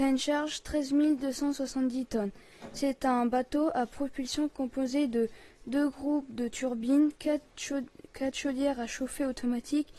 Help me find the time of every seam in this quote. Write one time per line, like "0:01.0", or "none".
none